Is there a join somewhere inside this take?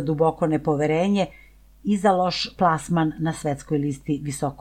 no; 0 cuts

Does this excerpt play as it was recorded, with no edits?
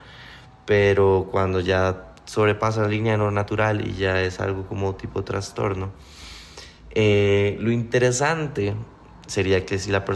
yes; 0 cuts

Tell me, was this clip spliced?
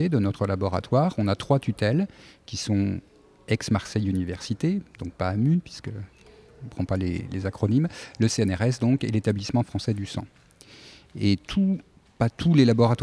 no; 0 cuts

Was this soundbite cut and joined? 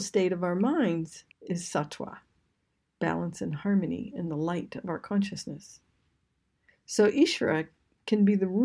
no; 0 cuts

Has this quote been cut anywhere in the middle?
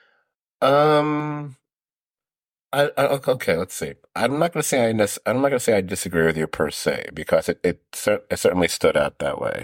no; 0 cuts

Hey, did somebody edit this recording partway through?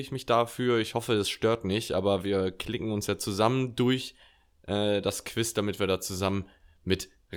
no; 0 cuts

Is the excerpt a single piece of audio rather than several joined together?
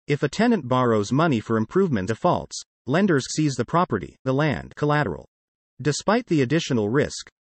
no; 4 cuts; at 2.1 s, 3.3 s, 4.3 s, 4.8 s

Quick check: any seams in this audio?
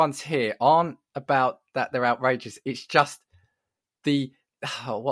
no; 0 cuts

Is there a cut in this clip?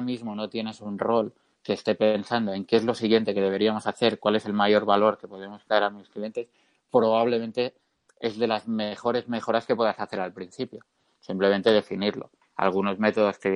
no; 0 cuts

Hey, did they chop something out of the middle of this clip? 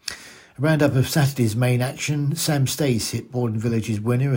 no; 0 cuts

